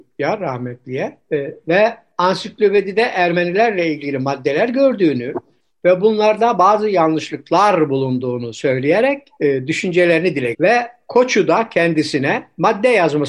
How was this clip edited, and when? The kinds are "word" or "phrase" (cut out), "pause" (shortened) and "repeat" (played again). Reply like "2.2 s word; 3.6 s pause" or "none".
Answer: 10.5 s word